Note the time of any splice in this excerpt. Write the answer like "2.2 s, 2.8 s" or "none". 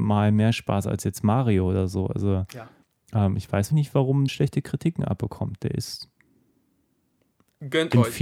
2.8 s, 3.7 s, 4.3 s